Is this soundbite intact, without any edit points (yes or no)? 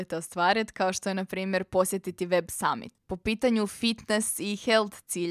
yes